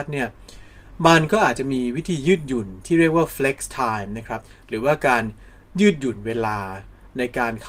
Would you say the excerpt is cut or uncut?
uncut